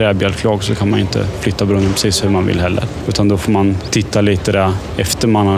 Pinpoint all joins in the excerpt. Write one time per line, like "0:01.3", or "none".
none

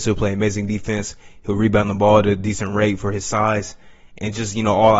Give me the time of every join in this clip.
none

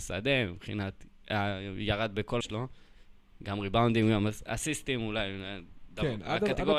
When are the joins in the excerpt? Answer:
0:02.4

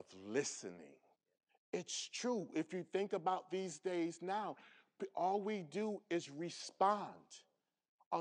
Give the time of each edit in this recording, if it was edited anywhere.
0:01.2

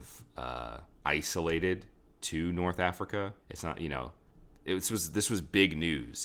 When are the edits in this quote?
0:00.9
0:03.4
0:04.3

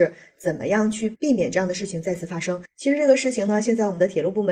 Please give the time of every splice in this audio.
none

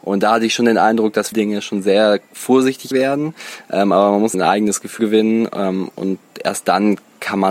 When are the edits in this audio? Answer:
0:01.3
0:02.9
0:04.3
0:05.0

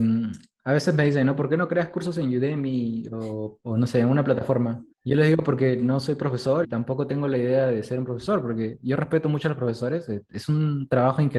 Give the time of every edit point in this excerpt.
0:04.9
0:06.6

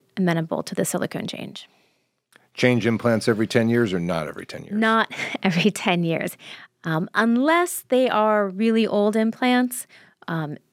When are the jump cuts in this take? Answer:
none

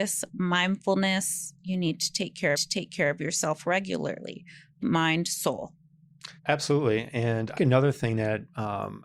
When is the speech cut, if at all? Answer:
0:01.6
0:02.5
0:04.8
0:06.4
0:07.5

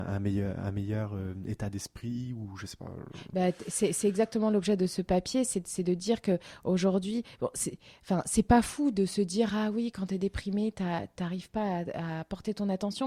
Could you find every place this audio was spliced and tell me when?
none

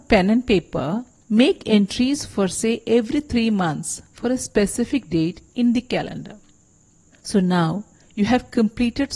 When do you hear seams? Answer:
none

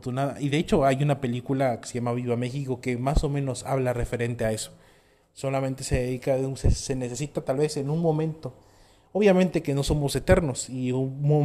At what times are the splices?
none

